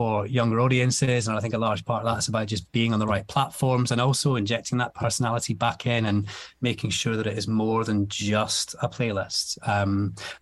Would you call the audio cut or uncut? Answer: uncut